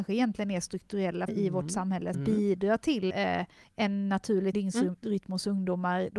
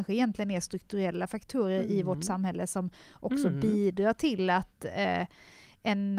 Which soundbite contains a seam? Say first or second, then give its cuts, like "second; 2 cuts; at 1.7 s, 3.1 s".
first; 5 cuts; at 1.3 s, 2.1 s, 3.1 s, 3.6 s, 4.5 s